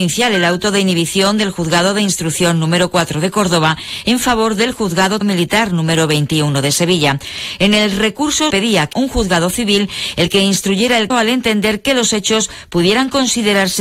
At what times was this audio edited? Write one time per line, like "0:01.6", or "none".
0:05.2
0:08.5
0:08.9
0:11.1